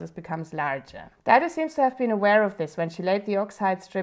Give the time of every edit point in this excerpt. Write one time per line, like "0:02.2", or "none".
0:01.2